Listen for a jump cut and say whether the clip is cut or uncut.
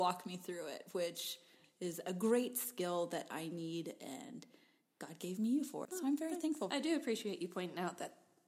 cut